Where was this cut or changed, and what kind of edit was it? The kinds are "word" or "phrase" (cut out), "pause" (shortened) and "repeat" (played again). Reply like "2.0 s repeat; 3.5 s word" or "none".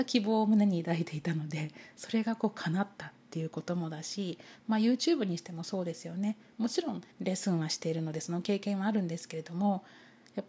7.1 s pause

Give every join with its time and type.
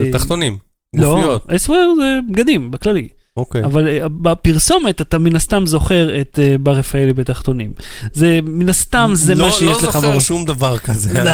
none

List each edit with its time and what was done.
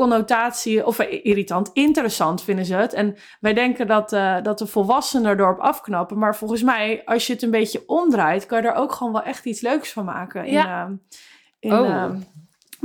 none

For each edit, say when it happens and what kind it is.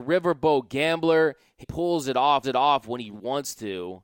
1.6 s word; 2.4 s repeat; 3.1 s word

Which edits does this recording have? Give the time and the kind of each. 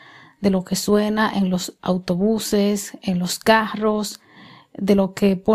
none

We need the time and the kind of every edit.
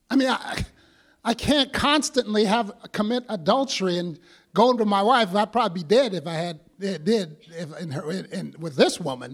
none

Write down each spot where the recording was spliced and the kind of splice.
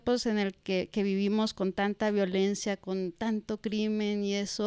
none

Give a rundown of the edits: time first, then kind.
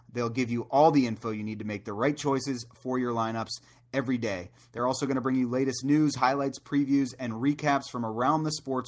none

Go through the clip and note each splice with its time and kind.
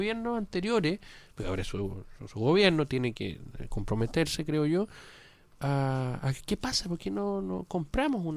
none

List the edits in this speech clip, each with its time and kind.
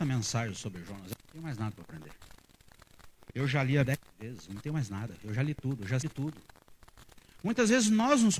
3.8 s word; 6.0 s word

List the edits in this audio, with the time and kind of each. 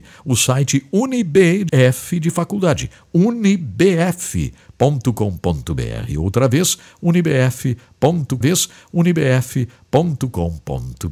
1.7 s word; 8.4 s repeat

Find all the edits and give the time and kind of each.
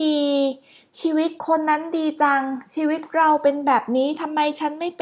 1.4 s pause

